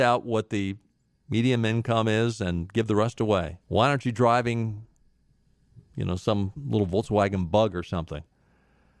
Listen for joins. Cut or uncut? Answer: cut